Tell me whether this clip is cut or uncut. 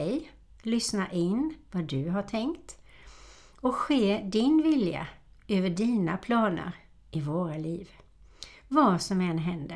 uncut